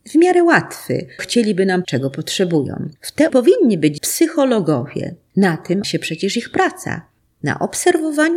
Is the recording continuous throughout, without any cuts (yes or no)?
no